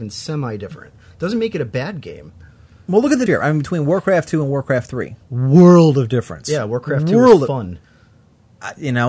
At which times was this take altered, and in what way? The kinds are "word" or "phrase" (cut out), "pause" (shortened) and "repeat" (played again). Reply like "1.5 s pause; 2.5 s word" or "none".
3.3 s word; 5.2 s pause